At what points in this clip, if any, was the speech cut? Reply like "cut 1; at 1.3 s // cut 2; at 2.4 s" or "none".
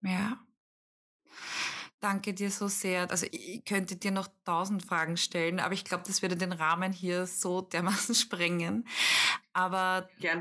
cut 1; at 3.3 s